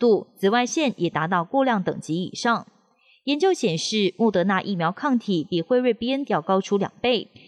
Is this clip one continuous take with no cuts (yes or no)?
no